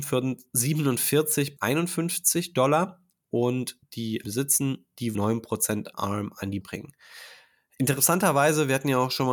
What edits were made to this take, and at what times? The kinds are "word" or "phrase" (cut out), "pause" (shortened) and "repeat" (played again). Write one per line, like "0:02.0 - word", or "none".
0:01.6 - word
0:03.8 - word
0:04.2 - word
0:05.1 - word
0:05.9 - word
0:06.6 - word